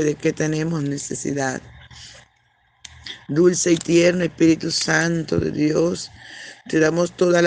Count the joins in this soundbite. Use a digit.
0